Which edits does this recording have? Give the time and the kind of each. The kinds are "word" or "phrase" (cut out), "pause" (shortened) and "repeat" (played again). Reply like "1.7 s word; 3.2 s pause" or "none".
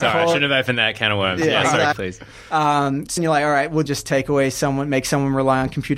1.9 s word; 3.2 s word; 3.9 s word

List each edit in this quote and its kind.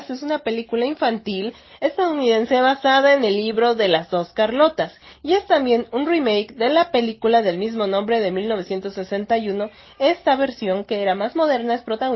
none

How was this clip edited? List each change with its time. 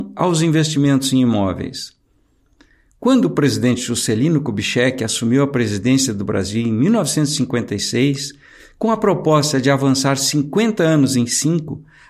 none

